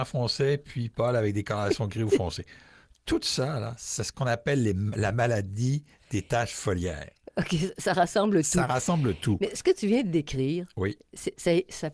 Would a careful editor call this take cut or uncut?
uncut